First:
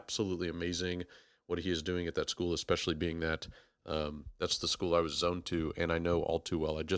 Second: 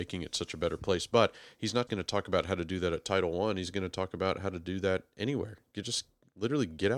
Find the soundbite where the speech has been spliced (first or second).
second